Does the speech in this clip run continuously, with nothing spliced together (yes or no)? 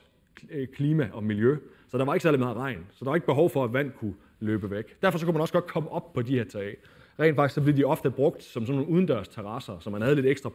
yes